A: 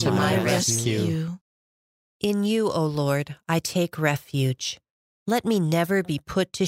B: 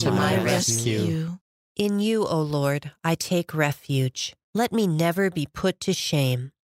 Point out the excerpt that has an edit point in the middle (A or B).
B